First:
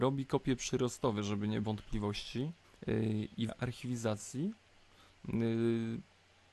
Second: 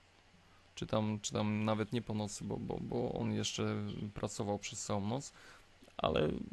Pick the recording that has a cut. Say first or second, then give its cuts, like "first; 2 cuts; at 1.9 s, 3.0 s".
first; 3 cuts; at 1.6 s, 2.6 s, 3.5 s